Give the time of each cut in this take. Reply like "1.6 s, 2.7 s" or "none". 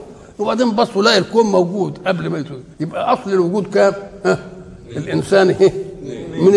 2.7 s